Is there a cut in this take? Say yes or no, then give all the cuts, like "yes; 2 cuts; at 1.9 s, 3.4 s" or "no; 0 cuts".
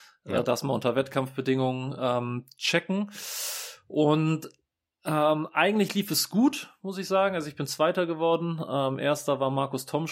no; 0 cuts